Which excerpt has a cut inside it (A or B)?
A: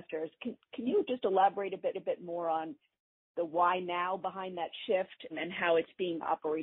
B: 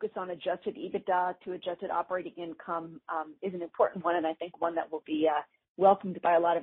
A